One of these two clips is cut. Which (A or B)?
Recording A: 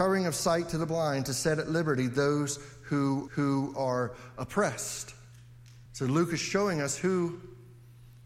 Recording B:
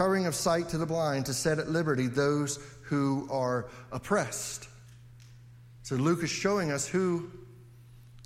A